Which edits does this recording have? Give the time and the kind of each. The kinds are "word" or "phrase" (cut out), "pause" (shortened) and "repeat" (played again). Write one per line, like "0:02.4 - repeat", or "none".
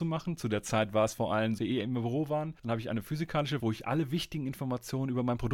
0:01.6 - word
0:02.6 - pause
0:03.6 - word